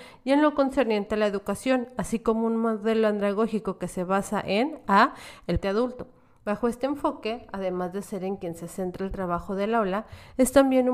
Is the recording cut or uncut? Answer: cut